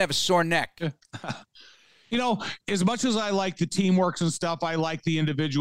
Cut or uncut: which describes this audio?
cut